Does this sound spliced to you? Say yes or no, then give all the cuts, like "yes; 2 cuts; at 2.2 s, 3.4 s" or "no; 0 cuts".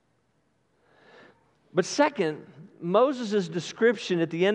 no; 0 cuts